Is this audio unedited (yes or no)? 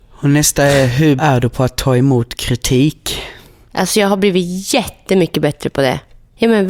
no